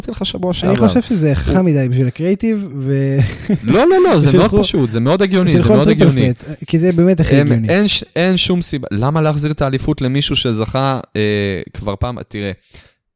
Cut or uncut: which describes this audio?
uncut